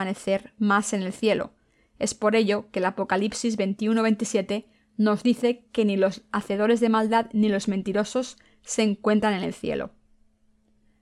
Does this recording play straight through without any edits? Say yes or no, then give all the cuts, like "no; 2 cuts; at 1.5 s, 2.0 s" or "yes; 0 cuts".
yes; 0 cuts